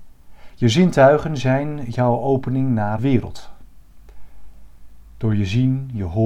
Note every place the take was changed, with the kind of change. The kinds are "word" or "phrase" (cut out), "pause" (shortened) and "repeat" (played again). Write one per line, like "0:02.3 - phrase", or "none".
0:03.0 - word